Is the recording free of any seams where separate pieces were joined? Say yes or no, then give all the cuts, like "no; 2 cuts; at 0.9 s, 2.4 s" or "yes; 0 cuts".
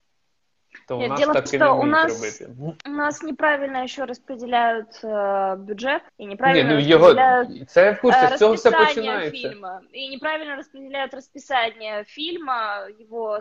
no; 3 cuts; at 1.5 s, 2.8 s, 6.1 s